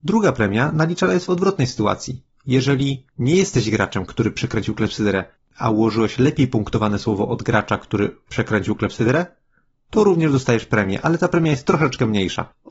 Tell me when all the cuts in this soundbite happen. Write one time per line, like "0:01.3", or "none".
none